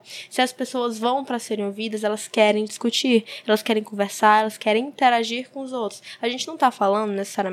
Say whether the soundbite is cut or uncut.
uncut